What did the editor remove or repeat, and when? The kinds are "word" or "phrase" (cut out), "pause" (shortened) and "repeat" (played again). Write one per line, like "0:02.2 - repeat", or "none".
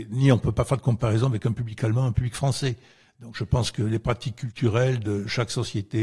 none